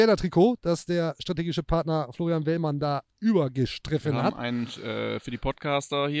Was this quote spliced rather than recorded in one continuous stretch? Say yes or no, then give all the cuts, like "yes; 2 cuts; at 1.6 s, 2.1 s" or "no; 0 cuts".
no; 0 cuts